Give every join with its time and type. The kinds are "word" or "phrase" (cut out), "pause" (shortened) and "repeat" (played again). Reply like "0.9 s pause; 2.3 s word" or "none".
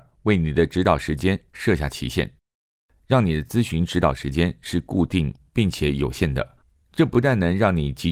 none